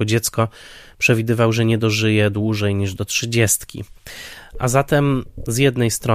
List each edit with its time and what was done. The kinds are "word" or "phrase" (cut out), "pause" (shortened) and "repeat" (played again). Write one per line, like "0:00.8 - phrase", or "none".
none